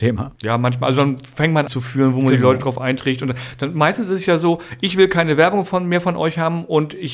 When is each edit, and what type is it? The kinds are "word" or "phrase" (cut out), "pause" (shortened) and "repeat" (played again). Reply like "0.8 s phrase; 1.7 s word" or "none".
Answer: 1.7 s phrase